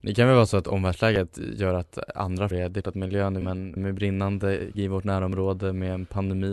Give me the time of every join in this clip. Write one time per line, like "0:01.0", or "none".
0:02.5
0:02.8
0:03.4
0:03.8
0:04.7